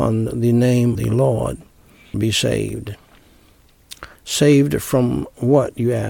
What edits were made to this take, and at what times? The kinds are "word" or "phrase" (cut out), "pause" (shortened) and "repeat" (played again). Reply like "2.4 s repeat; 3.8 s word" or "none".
0.9 s word; 2.1 s word; 4.2 s pause